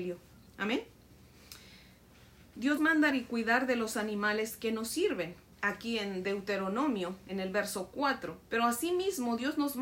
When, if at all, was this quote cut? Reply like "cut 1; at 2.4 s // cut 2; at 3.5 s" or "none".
cut 1; at 2.8 s // cut 2; at 3.1 s // cut 3; at 5.5 s // cut 4; at 8.5 s